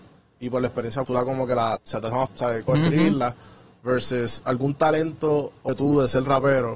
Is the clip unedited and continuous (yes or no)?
no